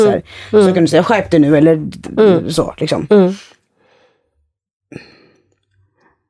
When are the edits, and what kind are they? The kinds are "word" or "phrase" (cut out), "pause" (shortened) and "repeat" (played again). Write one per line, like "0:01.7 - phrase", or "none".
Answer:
none